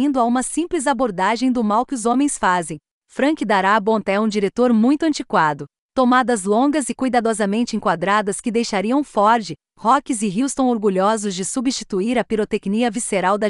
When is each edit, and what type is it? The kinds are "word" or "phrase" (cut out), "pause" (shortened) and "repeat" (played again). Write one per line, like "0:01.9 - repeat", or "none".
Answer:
none